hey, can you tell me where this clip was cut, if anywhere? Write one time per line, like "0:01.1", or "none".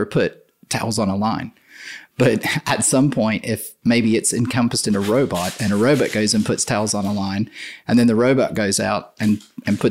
none